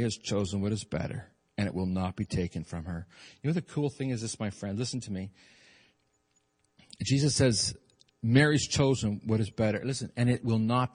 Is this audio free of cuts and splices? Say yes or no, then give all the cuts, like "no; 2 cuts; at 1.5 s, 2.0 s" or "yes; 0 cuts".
yes; 0 cuts